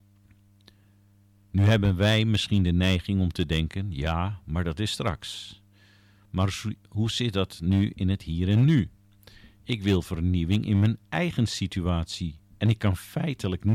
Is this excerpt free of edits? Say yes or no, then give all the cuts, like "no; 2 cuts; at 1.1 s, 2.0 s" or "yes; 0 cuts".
yes; 0 cuts